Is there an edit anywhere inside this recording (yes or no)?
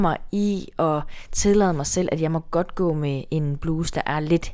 no